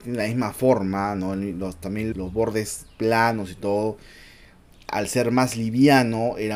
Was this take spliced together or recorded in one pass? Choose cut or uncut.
cut